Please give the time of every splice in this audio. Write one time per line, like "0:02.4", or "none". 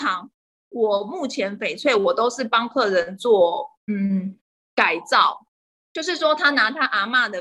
0:05.8

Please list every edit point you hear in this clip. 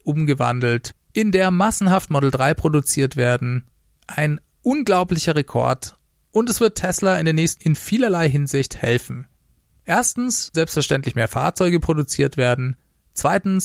0:07.6
0:10.5

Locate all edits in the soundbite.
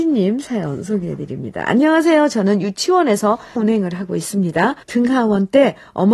0:03.6
0:04.8

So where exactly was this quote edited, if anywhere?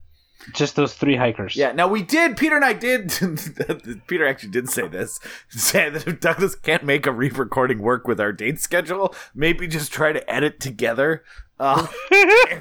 none

